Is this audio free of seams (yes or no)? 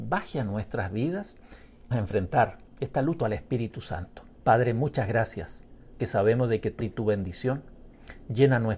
no